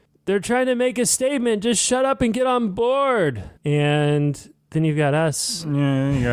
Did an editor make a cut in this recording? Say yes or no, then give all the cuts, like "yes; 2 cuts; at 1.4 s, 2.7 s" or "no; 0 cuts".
yes; 1 cut; at 3.6 s